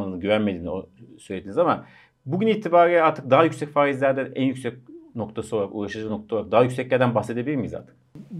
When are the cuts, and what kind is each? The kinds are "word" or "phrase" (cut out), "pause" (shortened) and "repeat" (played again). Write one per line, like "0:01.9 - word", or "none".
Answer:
none